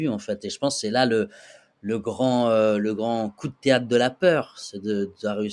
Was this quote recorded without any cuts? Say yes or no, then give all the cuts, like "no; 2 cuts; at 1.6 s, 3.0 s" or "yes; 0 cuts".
yes; 0 cuts